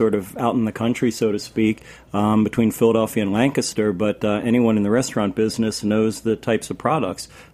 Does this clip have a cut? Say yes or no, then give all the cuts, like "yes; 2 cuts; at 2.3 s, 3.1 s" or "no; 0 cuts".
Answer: no; 0 cuts